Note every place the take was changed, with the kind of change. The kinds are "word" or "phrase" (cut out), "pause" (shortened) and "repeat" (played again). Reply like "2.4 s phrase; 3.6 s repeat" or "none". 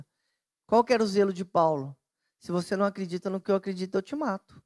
none